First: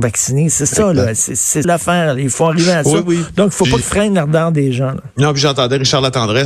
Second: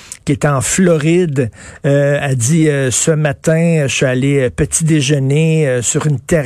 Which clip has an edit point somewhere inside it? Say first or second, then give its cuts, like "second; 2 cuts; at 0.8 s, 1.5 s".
first; 3 cuts; at 1.6 s, 3.8 s, 5.1 s